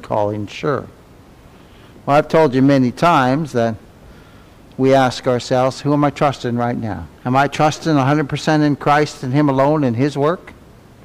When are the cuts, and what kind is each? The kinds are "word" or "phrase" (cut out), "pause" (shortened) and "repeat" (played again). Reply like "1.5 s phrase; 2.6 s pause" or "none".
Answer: 7.2 s pause